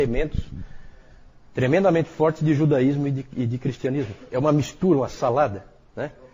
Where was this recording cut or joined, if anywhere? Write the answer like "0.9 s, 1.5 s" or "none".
none